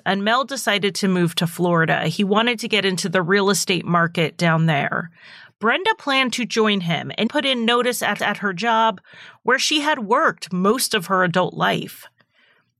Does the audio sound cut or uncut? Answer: cut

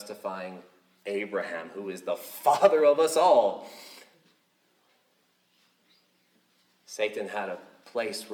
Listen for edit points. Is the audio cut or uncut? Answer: uncut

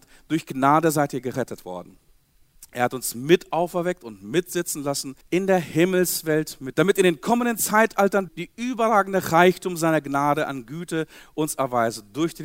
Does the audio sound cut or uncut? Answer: cut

